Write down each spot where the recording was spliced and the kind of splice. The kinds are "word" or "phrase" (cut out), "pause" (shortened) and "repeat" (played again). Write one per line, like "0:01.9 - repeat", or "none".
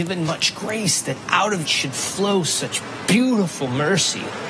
0:01.6 - word

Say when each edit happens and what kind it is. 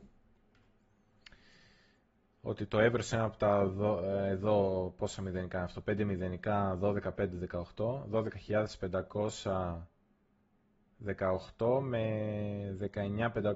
none

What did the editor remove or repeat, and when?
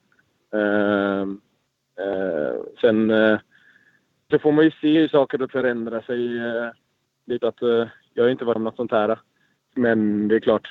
0:04.3 - word
0:05.5 - word
0:07.4 - word
0:08.6 - word

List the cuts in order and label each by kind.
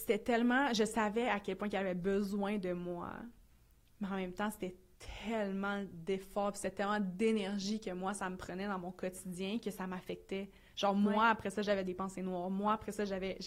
none

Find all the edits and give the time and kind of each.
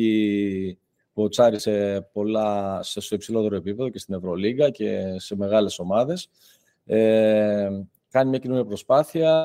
none

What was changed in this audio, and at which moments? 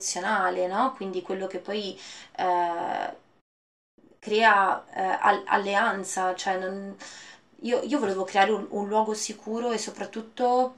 none

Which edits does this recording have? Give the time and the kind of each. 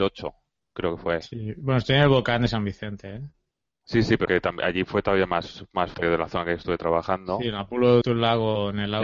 0:04.3 - word
0:05.9 - word
0:08.0 - word

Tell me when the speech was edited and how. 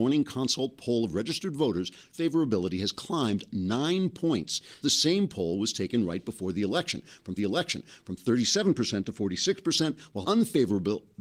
0:02.1 - word
0:04.8 - word
0:07.4 - repeat
0:10.2 - word

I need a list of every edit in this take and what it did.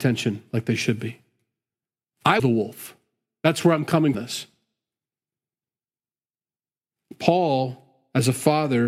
0:02.4 - word
0:04.1 - phrase

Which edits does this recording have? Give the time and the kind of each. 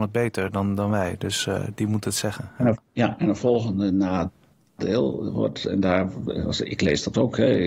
0:02.9 - pause

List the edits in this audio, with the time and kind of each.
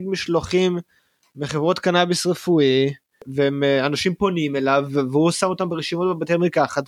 none

